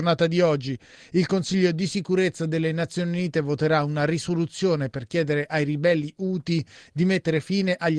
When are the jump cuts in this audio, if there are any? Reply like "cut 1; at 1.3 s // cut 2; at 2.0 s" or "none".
none